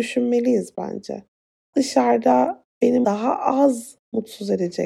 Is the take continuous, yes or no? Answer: no